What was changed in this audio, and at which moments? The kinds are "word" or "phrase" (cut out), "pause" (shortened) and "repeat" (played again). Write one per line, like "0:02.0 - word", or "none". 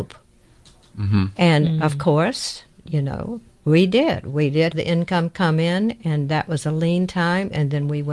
0:03.5 - pause
0:04.7 - word